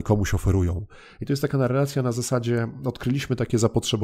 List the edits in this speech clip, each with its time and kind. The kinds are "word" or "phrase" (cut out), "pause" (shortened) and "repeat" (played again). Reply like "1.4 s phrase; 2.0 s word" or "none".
none